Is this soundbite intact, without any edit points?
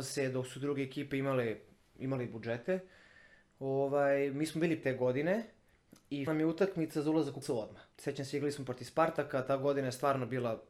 no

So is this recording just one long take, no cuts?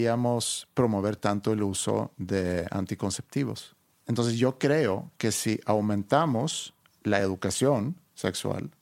yes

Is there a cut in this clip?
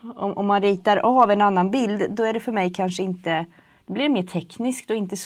no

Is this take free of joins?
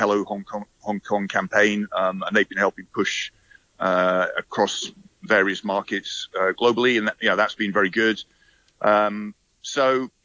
yes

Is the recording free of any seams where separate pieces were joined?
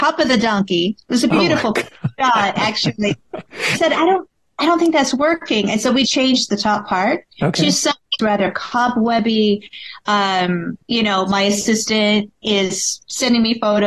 no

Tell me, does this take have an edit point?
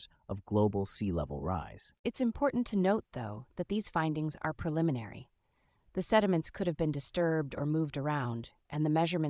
no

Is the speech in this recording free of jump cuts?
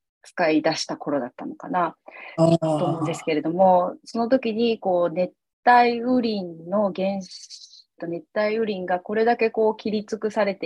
no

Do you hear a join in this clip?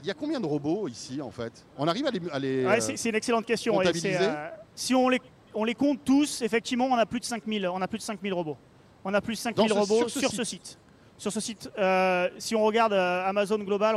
yes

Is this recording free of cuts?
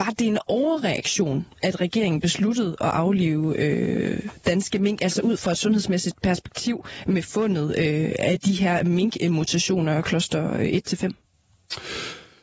yes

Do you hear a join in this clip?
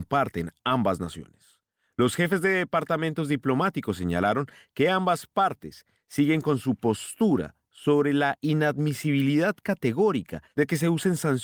no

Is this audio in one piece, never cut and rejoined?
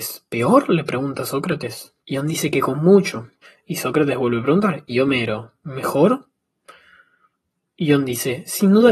no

